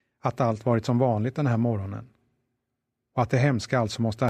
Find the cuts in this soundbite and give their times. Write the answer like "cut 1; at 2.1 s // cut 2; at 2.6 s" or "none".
none